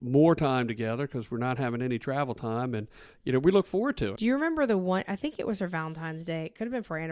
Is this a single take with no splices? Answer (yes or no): no